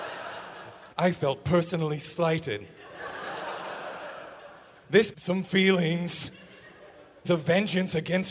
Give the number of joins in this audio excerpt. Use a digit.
3